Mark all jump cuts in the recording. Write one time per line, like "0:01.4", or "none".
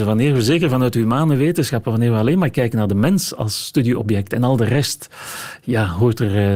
none